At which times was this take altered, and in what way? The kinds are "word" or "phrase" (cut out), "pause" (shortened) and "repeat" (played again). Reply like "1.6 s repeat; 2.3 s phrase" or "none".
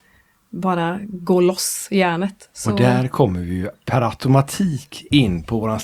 none